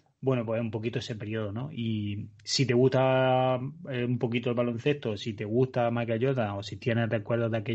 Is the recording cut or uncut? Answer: uncut